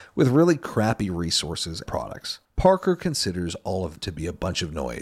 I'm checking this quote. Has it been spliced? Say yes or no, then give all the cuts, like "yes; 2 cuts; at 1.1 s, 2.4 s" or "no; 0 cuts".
yes; 3 cuts; at 1.9 s, 2.4 s, 4.0 s